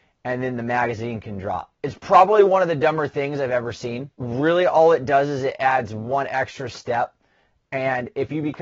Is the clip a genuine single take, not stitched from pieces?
no; 2 cuts; at 1.7 s, 4.1 s

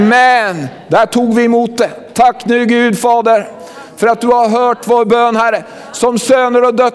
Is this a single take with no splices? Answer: yes; 0 cuts

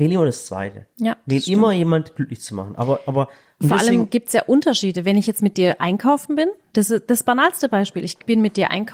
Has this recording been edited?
no; 0 cuts

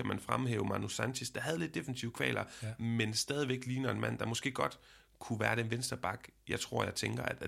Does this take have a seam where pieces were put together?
no; 0 cuts

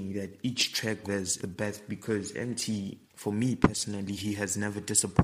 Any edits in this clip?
yes; 3 cuts; at 1.0 s, 1.4 s, 3.0 s

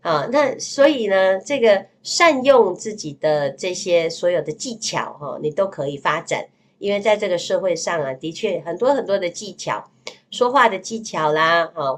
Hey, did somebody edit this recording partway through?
no; 0 cuts

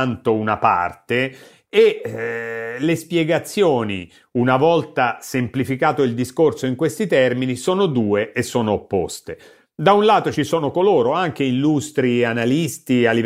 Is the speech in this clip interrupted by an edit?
no; 0 cuts

